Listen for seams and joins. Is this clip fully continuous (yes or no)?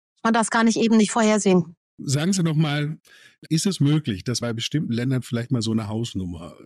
no